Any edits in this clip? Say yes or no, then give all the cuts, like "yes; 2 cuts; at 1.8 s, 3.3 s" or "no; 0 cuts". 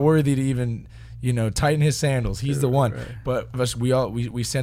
yes; 1 cut; at 3.5 s